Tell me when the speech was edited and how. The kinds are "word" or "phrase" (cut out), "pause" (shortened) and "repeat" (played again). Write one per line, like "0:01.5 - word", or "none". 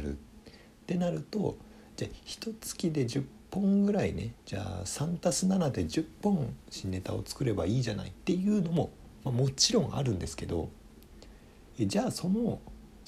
0:04.4 - pause